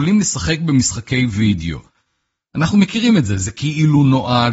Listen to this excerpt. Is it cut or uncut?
uncut